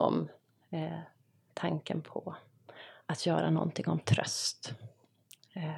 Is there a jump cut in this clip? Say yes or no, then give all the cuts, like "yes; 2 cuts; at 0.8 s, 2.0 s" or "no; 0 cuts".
no; 0 cuts